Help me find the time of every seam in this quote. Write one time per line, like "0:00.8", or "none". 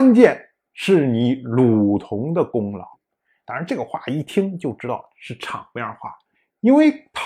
0:02.9
0:06.3